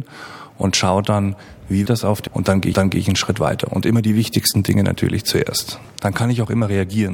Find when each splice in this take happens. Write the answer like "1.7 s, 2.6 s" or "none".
1.9 s, 2.3 s, 2.7 s